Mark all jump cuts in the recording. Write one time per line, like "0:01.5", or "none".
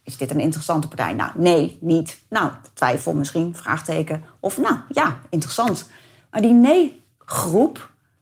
none